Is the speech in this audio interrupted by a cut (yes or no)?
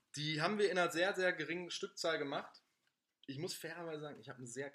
no